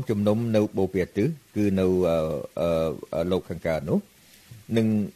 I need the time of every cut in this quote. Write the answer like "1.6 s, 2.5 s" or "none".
1.5 s